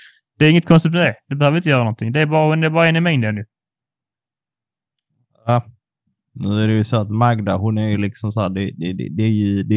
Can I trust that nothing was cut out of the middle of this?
yes; 0 cuts

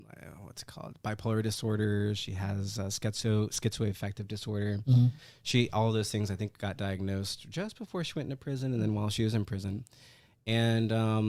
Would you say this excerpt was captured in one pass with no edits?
yes; 0 cuts

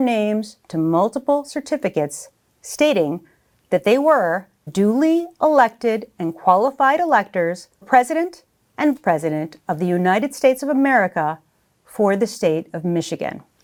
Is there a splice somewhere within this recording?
yes; 3 cuts; at 4.7 s, 7.8 s, 9.0 s

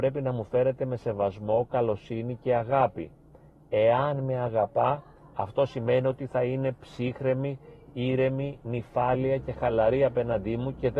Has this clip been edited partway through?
no; 0 cuts

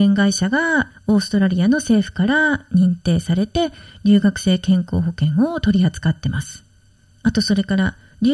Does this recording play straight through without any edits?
yes; 0 cuts

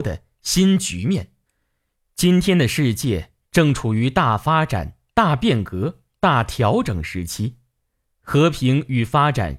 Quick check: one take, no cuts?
yes; 0 cuts

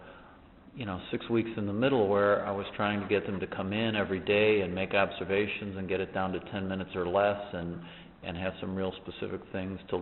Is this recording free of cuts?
yes; 0 cuts

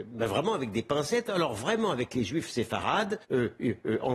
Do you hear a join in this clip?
yes; 1 cut; at 3.2 s

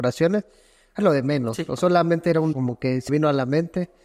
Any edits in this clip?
yes; 4 cuts; at 1.0 s, 1.8 s, 2.5 s, 3.1 s

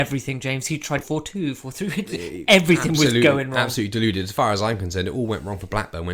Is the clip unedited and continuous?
no; 2 cuts; at 1.0 s, 2.2 s

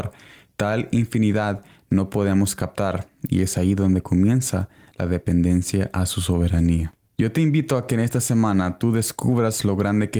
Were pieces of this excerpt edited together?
no; 0 cuts

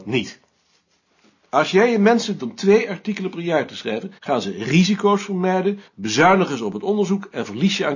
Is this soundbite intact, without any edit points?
no; 3 cuts; at 2.4 s, 4.2 s, 5.9 s

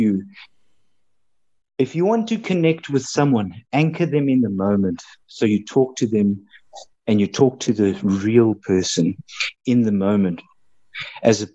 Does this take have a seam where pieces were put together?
no; 0 cuts

